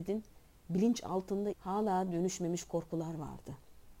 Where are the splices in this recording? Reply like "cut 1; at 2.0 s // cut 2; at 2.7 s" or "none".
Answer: cut 1; at 1.5 s